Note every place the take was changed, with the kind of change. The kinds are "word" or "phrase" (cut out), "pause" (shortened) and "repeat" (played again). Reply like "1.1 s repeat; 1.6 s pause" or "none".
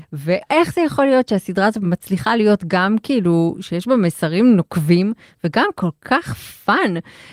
none